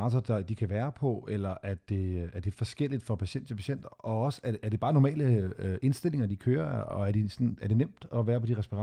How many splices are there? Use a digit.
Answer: 0